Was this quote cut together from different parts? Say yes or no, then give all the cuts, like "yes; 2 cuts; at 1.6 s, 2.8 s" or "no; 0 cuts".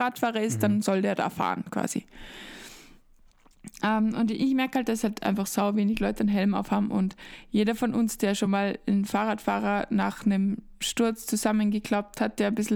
no; 0 cuts